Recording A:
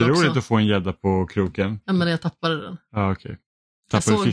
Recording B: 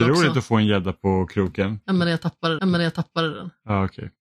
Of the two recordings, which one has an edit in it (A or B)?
B